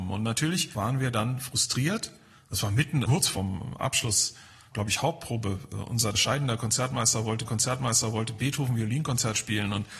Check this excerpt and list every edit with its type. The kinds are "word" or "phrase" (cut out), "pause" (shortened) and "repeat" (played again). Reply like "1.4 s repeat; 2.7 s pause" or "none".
3.1 s word; 6.1 s word; 7.5 s repeat